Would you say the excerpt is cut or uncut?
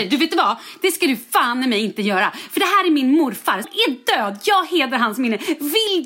cut